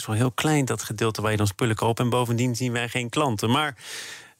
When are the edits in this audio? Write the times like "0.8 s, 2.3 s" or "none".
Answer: 1.8 s